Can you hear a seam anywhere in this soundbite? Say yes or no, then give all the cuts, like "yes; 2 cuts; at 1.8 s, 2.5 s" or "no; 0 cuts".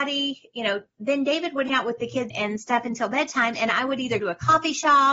yes; 3 cuts; at 1.7 s, 2.3 s, 4.2 s